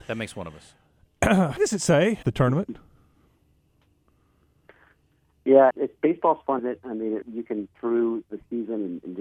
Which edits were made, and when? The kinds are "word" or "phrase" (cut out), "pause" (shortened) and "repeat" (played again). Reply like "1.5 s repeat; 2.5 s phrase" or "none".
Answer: 1.6 s word; 2.2 s word; 5.7 s word; 6.6 s word; 7.2 s word; 7.8 s word